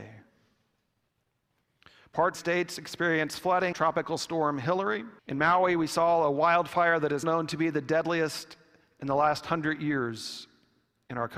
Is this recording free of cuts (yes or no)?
no